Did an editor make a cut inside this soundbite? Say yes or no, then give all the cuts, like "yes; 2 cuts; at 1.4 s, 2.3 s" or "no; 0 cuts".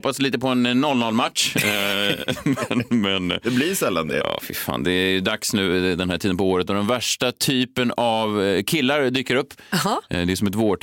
no; 0 cuts